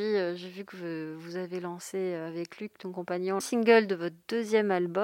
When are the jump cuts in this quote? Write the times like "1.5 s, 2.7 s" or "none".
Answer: 3.4 s